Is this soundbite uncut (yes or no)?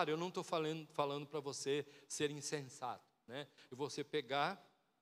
yes